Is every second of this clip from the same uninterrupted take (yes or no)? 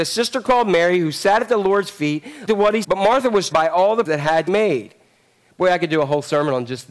no